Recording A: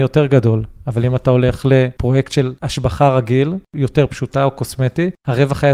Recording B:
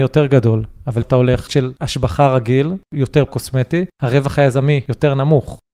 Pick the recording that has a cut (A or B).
B